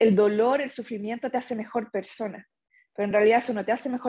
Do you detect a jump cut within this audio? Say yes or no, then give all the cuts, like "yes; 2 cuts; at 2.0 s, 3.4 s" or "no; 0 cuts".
no; 0 cuts